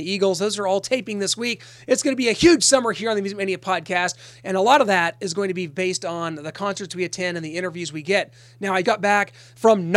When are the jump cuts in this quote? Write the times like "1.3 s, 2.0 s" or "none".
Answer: 8.8 s